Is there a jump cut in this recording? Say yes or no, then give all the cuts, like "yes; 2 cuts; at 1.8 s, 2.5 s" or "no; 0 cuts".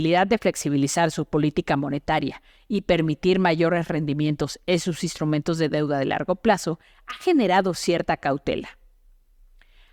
no; 0 cuts